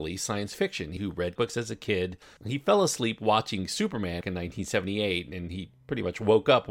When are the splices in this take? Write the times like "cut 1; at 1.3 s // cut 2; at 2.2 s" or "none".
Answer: cut 1; at 1.0 s // cut 2; at 1.4 s // cut 3; at 2.2 s // cut 4; at 4.2 s